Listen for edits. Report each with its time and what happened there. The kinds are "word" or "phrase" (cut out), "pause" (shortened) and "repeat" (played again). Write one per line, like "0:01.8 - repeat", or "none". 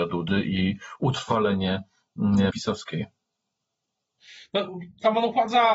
0:02.5 - word